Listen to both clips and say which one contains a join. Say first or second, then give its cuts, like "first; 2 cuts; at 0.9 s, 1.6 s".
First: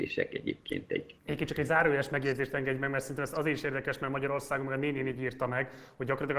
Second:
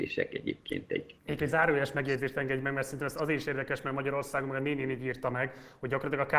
second; 1 cut; at 1.4 s